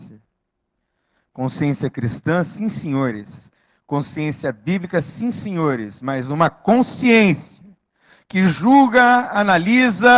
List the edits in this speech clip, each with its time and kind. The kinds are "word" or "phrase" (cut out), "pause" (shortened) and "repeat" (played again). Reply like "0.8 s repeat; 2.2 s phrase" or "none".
none